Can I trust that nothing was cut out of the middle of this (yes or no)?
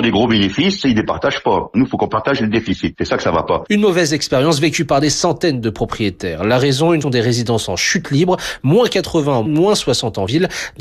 no